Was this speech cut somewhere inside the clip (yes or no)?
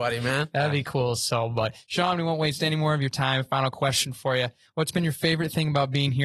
no